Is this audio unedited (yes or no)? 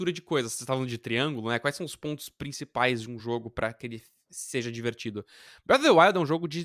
yes